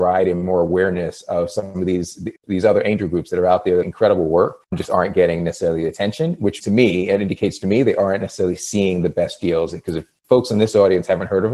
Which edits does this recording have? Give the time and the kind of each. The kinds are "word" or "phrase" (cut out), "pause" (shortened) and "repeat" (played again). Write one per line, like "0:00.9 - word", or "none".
0:03.8 - phrase
0:04.6 - pause
0:06.6 - word